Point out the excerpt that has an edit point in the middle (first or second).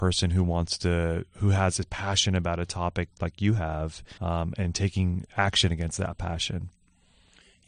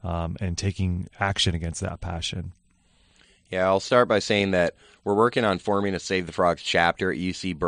first